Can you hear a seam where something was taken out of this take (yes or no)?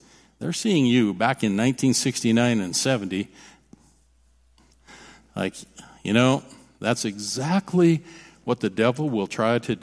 no